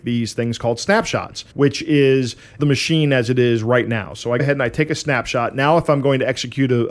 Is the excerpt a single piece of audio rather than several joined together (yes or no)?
no